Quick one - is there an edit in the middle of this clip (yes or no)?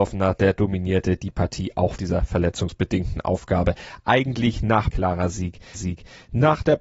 yes